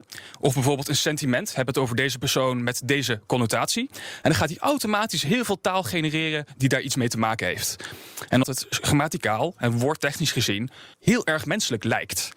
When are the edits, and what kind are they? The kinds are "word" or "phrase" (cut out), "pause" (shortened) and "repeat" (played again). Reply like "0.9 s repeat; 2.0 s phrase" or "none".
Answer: 8.4 s phrase; 10.9 s pause